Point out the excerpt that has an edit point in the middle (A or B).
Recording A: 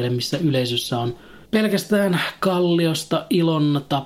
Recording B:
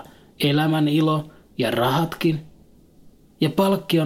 A